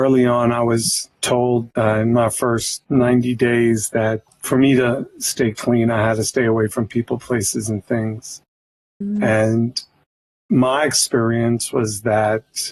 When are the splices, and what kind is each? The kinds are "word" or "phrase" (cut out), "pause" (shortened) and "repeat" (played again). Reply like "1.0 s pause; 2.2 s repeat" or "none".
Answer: none